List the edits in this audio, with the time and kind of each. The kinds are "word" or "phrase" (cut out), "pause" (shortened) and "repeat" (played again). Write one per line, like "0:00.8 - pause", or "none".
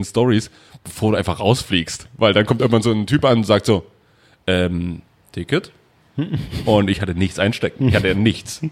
none